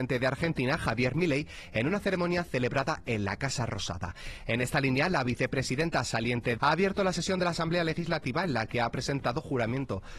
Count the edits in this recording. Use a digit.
1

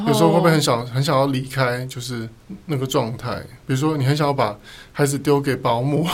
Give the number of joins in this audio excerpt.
1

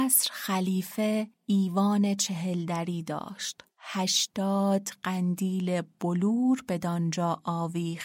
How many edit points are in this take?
2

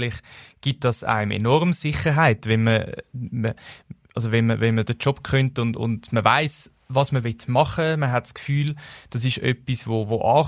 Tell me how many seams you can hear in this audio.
0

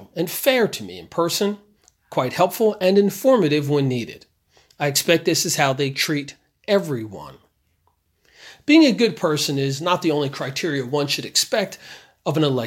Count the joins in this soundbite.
0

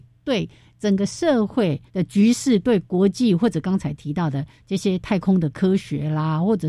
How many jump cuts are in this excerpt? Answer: 1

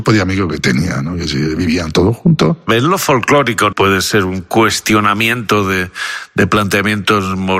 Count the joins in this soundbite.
1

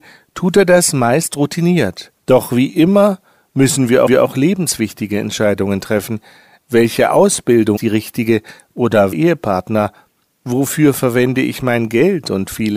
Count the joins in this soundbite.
4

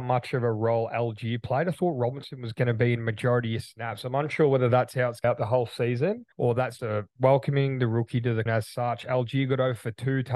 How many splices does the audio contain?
5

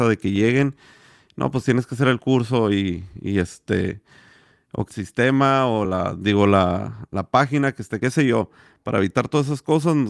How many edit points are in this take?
3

